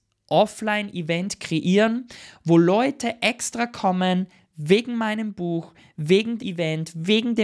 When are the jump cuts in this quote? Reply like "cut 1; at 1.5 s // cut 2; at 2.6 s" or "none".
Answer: cut 1; at 6.4 s